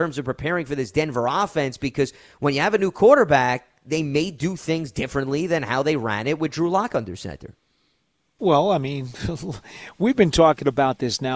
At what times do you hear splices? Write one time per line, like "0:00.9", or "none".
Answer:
none